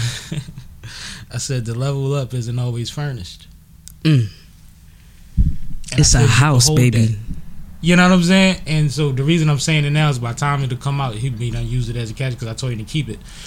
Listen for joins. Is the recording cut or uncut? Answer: cut